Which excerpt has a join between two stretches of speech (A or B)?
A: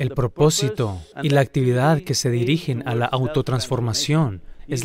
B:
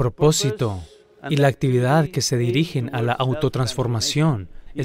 A